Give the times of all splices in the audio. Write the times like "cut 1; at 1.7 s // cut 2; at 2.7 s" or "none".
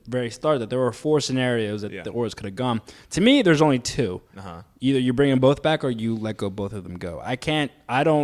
none